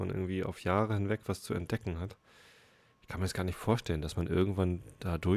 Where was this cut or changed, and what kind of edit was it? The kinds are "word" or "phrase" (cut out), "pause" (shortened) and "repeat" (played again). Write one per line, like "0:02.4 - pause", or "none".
none